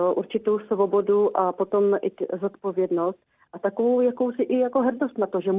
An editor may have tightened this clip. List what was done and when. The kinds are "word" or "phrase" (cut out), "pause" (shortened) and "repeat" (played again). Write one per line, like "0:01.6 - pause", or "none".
none